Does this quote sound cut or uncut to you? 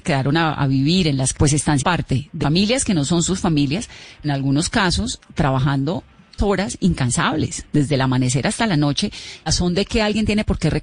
cut